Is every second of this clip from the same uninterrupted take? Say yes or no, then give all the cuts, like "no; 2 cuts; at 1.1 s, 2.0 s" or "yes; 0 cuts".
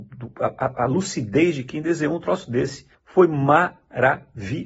no; 1 cut; at 2.9 s